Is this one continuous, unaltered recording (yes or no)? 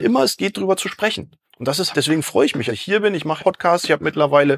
no